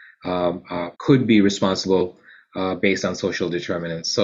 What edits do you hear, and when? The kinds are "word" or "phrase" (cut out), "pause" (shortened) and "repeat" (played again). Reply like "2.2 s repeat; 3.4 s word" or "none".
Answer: 0.9 s pause